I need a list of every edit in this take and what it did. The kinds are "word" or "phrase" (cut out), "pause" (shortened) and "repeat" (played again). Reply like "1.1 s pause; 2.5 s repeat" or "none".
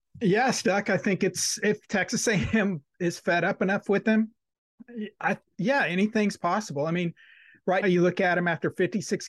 7.8 s word